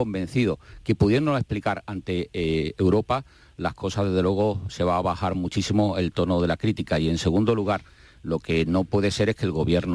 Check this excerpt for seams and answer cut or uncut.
uncut